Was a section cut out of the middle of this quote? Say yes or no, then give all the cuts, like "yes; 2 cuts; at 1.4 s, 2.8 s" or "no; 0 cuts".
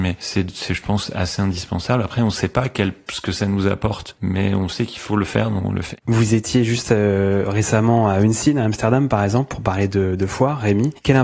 yes; 1 cut; at 6.0 s